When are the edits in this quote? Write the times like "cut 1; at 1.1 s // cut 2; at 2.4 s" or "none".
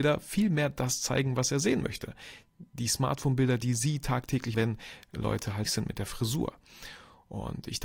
cut 1; at 4.5 s // cut 2; at 5.7 s